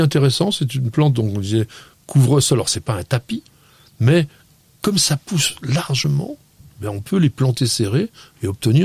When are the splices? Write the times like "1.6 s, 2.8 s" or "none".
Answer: none